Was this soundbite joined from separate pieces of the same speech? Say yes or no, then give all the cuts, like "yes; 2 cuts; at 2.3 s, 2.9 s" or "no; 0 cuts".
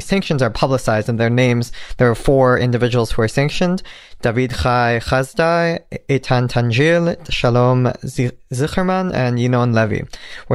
no; 0 cuts